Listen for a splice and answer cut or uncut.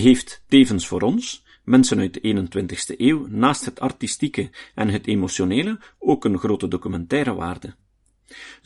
uncut